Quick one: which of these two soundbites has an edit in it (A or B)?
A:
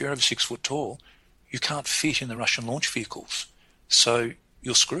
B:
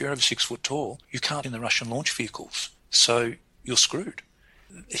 B